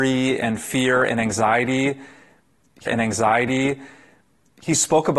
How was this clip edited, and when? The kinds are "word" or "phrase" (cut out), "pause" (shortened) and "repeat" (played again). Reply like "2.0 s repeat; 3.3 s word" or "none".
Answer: 2.9 s repeat